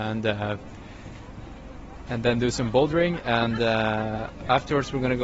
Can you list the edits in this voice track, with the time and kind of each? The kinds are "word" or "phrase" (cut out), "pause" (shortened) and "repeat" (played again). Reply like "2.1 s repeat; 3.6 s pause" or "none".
none